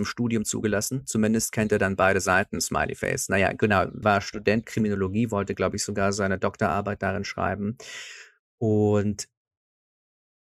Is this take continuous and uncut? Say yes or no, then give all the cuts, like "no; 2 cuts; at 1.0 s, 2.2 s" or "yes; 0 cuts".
no; 2 cuts; at 4.0 s, 4.6 s